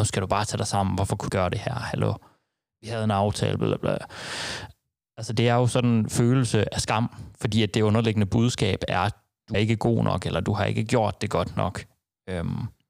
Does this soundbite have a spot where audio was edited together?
yes; 3 cuts; at 1.3 s, 3.6 s, 9.5 s

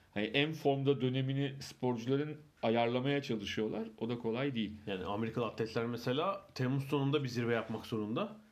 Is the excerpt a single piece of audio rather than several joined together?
no; 1 cut; at 2.5 s

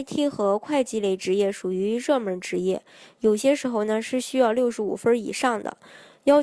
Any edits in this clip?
no; 0 cuts

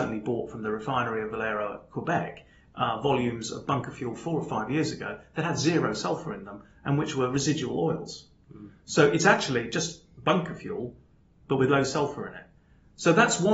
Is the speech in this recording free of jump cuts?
yes; 0 cuts

